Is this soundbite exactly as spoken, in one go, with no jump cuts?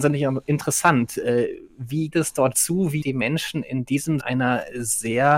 no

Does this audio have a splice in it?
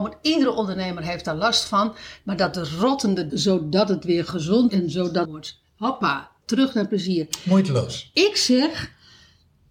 yes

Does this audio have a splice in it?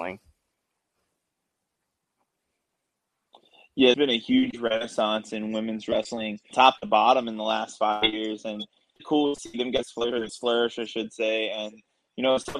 yes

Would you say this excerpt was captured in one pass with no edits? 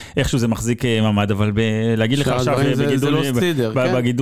yes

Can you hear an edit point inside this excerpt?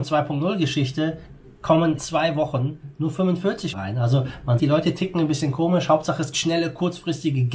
yes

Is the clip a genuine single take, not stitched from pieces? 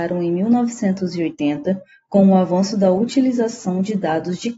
yes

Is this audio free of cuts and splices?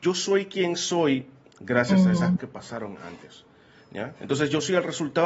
no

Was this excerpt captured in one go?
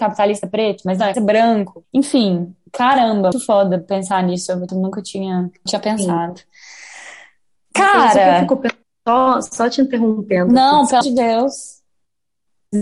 no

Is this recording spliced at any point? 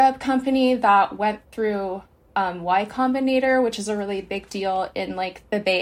no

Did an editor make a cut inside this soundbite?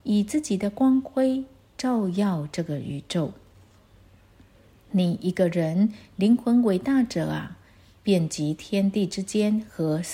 no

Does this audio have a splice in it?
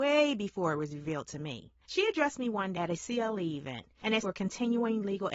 yes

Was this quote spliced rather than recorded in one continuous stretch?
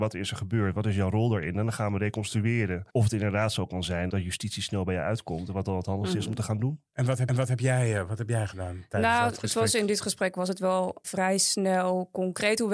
yes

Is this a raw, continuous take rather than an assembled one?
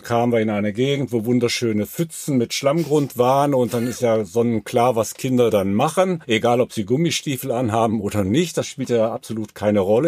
yes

